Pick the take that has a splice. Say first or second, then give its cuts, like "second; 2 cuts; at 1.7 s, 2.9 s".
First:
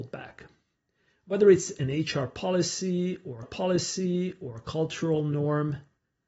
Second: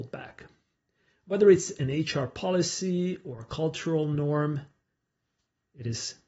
first; 1 cut; at 3.4 s